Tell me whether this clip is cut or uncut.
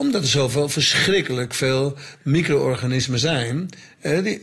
uncut